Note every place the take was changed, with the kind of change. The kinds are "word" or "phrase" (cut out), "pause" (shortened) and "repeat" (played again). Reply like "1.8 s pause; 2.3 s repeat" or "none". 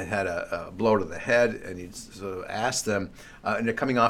none